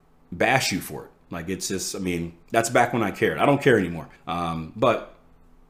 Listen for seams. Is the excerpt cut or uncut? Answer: cut